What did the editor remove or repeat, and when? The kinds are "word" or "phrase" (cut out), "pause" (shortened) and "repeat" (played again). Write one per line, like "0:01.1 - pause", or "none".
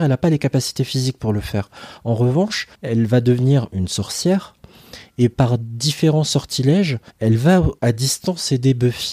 0:02.7 - pause
0:07.1 - pause
0:07.8 - pause